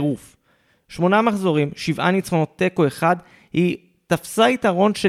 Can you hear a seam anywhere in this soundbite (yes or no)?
no